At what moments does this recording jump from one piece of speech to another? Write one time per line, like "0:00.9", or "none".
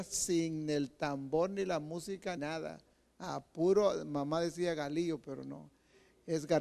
0:02.4